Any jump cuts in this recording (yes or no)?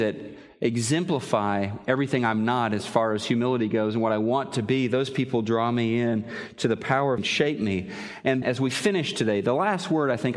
yes